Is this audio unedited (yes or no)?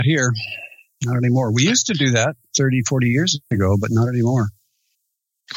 yes